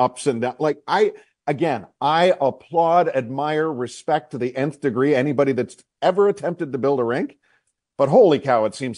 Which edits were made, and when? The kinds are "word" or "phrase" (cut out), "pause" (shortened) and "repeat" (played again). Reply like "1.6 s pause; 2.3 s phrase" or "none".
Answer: none